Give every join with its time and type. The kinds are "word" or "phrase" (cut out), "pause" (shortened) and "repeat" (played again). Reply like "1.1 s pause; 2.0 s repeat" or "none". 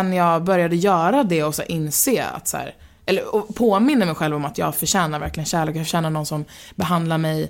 none